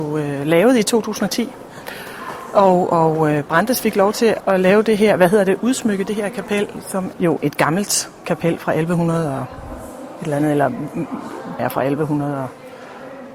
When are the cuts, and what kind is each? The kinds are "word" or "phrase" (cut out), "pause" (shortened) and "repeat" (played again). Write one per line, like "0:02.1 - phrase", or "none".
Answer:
0:04.4 - word
0:07.1 - word
0:11.6 - word